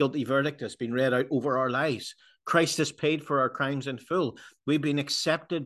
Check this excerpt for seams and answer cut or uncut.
uncut